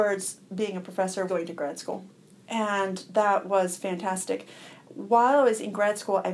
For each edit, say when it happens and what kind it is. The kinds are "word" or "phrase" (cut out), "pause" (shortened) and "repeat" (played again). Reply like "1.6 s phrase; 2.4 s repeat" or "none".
1.3 s word